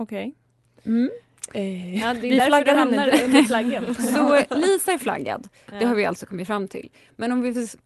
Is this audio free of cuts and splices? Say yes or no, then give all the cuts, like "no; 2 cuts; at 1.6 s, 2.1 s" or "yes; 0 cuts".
yes; 0 cuts